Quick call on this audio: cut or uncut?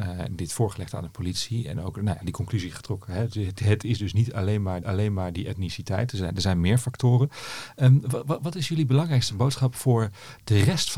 cut